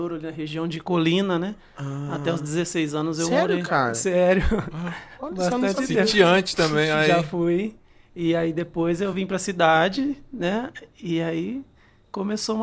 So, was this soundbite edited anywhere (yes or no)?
no